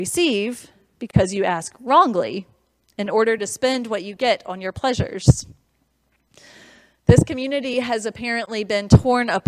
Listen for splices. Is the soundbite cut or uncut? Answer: uncut